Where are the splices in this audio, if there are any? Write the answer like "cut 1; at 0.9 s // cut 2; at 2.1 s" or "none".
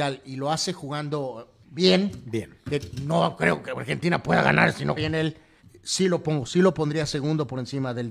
cut 1; at 1.6 s // cut 2; at 5.0 s // cut 3; at 5.6 s // cut 4; at 6.5 s